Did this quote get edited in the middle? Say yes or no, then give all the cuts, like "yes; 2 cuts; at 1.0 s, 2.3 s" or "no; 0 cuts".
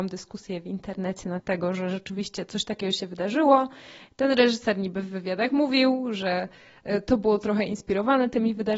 yes; 1 cut; at 1.4 s